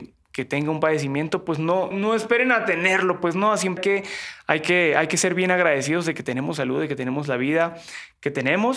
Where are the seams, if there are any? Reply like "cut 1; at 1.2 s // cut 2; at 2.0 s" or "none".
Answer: cut 1; at 1.9 s // cut 2; at 3.8 s